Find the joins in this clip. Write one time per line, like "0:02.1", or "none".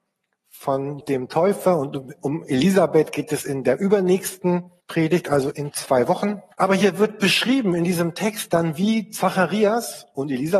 0:01.0
0:04.8
0:05.5
0:06.5